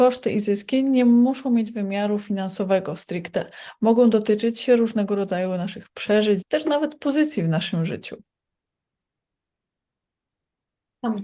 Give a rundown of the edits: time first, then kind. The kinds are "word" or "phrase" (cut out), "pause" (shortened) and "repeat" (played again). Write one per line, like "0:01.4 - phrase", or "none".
0:06.4 - word